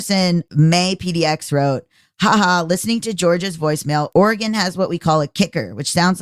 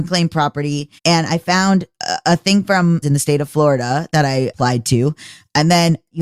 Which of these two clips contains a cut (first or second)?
second